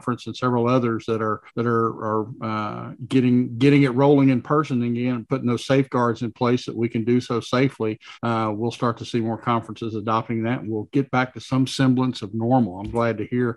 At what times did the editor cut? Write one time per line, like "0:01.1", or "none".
0:01.5
0:08.1